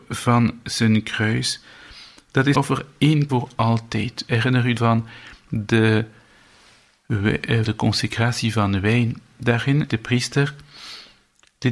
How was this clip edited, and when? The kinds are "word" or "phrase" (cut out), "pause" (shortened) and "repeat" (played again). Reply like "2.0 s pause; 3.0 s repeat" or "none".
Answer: 2.5 s word; 3.3 s word; 4.8 s word; 7.6 s word; 9.9 s word